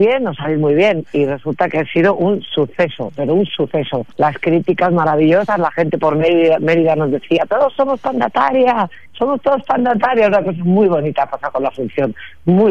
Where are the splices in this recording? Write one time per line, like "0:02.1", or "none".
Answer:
0:04.1
0:09.1

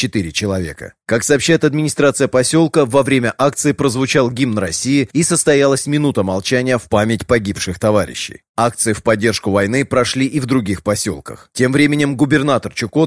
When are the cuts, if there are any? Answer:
none

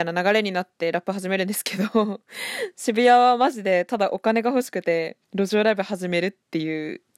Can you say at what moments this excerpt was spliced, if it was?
0:05.2

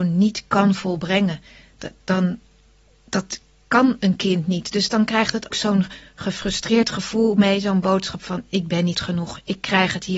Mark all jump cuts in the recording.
0:05.5
0:08.9

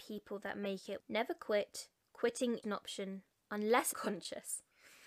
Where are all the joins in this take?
0:01.0
0:02.6
0:03.9

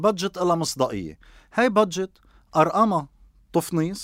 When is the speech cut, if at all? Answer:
none

